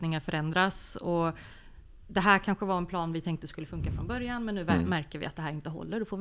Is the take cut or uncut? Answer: uncut